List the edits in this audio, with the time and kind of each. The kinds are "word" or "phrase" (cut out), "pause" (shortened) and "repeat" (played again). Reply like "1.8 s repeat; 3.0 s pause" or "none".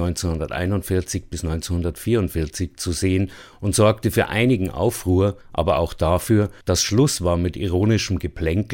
5.4 s pause; 6.6 s pause